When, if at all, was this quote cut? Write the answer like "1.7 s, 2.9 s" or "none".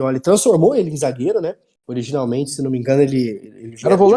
none